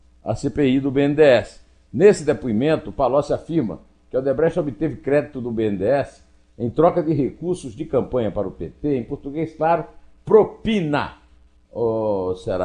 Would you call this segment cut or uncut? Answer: uncut